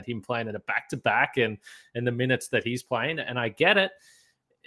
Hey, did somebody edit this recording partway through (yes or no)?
no